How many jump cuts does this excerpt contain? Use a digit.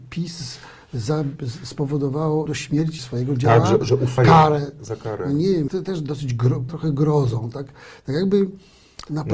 6